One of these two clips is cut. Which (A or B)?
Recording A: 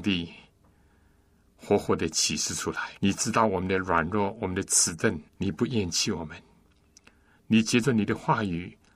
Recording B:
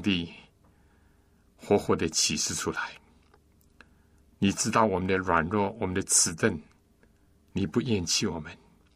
A